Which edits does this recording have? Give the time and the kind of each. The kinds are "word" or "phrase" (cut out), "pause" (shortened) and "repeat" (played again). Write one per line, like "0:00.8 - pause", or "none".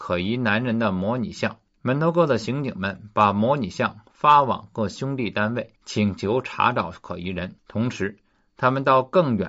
0:05.8 - pause
0:07.6 - pause